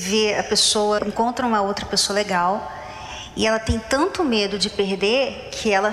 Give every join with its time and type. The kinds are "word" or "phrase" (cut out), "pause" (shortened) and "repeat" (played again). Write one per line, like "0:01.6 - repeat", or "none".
0:01.0 - word